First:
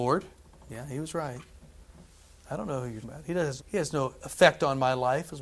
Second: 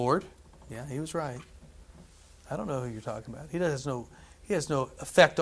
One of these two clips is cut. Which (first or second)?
first